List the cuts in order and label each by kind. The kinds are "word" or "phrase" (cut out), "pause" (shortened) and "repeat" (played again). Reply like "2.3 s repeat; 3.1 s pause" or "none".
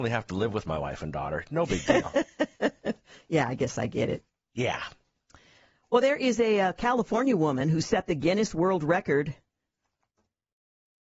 none